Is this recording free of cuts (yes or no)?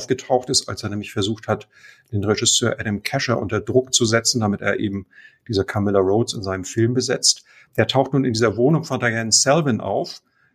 yes